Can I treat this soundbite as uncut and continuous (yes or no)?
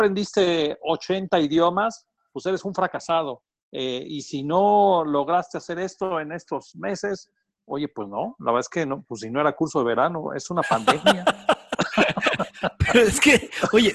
yes